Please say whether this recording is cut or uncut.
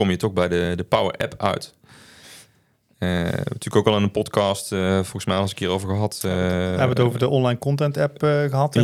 uncut